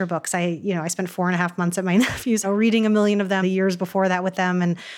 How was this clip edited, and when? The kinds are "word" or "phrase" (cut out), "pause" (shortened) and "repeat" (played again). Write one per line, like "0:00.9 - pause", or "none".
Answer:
0:02.4 - phrase
0:03.4 - word